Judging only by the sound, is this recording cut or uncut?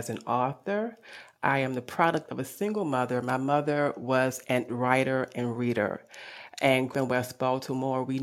cut